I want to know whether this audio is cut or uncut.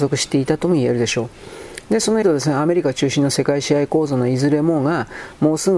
cut